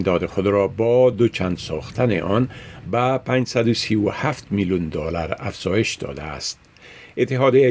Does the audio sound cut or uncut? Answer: uncut